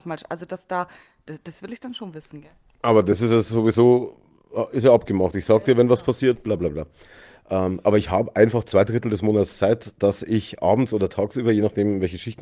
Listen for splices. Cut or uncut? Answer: uncut